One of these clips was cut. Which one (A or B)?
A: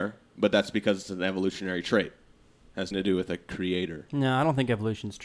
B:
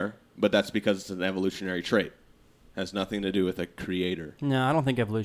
A